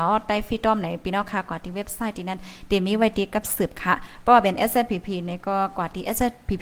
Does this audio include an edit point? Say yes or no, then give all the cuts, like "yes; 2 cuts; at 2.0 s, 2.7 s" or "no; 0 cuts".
no; 0 cuts